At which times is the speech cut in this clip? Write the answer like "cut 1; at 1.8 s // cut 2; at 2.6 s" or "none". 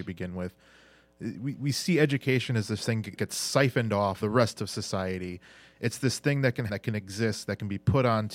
cut 1; at 3.2 s // cut 2; at 4.2 s // cut 3; at 6.7 s